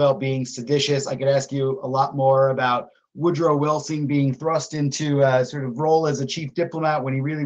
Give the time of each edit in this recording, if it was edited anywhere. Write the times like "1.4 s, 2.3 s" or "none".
none